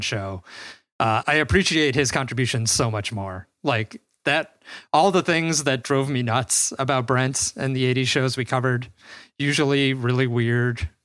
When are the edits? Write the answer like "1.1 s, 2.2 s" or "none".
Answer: 1.2 s